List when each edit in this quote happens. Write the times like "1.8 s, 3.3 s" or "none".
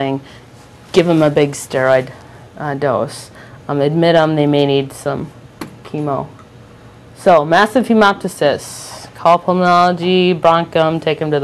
none